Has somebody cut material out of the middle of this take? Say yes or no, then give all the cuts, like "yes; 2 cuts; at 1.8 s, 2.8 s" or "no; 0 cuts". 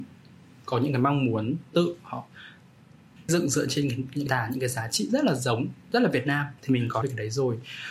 yes; 5 cuts; at 1.7 s, 3.3 s, 4.3 s, 6.6 s, 7.0 s